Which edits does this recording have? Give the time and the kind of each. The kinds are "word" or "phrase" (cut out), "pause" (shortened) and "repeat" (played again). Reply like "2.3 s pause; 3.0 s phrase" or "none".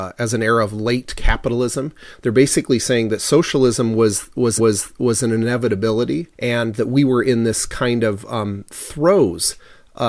4.6 s repeat; 6.3 s pause